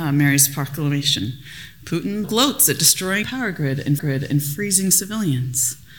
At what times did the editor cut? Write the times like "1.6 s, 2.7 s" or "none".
2.2 s, 3.2 s, 4.0 s